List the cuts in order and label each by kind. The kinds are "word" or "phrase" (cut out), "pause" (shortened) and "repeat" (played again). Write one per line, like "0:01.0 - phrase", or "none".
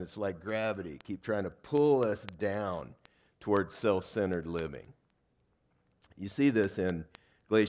none